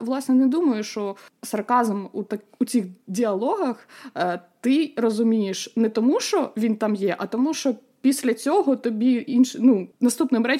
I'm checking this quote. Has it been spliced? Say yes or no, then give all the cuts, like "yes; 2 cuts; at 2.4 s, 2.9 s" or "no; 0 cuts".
no; 0 cuts